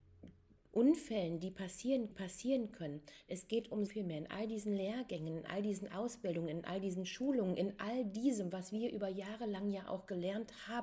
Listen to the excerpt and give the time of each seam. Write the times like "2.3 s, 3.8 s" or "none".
2.1 s, 3.9 s